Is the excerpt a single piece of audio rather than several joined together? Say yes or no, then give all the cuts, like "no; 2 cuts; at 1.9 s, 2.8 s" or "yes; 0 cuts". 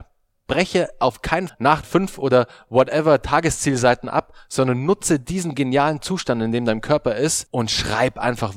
no; 2 cuts; at 1.5 s, 1.8 s